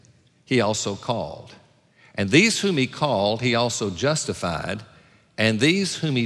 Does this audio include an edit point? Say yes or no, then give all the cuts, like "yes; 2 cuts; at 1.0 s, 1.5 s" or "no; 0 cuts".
no; 0 cuts